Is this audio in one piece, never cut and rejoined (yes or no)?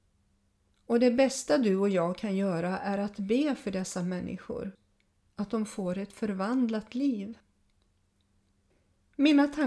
yes